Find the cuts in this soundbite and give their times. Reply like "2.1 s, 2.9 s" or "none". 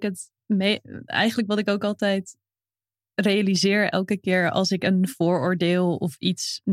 none